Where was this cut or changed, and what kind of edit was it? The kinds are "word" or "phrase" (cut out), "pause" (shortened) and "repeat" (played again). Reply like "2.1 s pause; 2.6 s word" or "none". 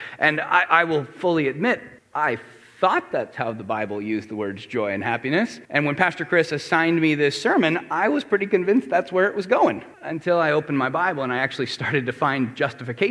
2.0 s pause; 5.6 s pause; 9.9 s pause